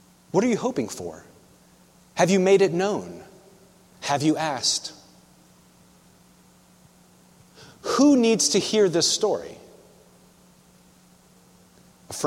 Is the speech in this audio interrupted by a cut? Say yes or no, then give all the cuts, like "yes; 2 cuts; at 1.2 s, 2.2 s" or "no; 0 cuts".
no; 0 cuts